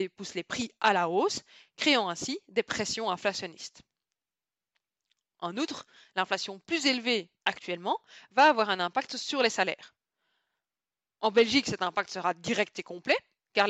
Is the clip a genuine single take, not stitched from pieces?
yes; 0 cuts

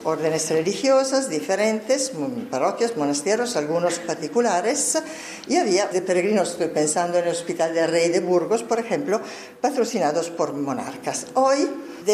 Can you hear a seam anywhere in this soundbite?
yes; 1 cut; at 5.9 s

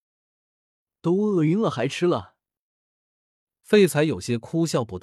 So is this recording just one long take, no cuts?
yes; 0 cuts

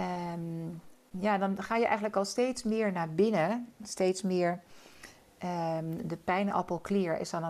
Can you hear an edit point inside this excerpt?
no; 0 cuts

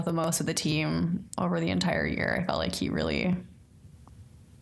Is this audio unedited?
yes; 0 cuts

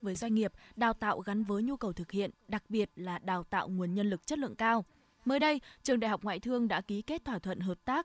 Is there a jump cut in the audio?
no; 0 cuts

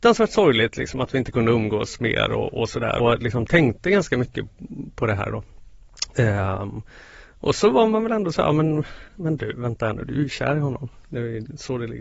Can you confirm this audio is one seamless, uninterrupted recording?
no; 2 cuts; at 3.0 s, 9.1 s

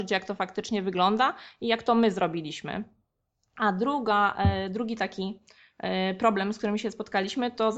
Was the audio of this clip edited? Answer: no; 0 cuts

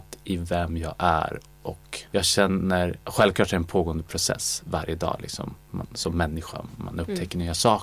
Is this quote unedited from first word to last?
no; 2 cuts; at 2.1 s, 3.0 s

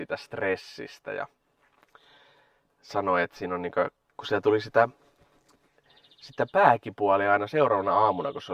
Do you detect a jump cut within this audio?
no; 0 cuts

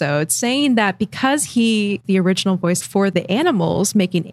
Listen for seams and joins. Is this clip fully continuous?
no; 2 cuts; at 2.0 s, 2.8 s

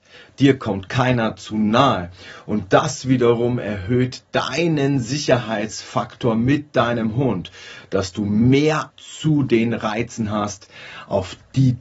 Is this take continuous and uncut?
no; 1 cut; at 8.9 s

